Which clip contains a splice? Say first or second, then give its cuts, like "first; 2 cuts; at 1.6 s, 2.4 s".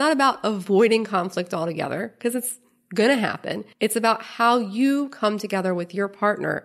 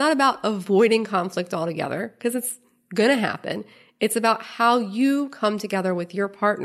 first; 1 cut; at 3.7 s